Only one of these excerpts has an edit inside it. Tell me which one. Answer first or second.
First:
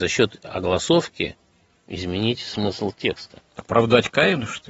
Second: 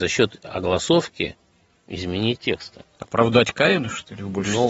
second